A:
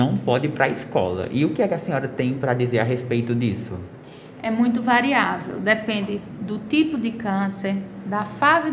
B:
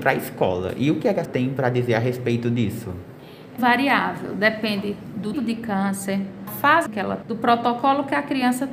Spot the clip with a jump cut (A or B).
B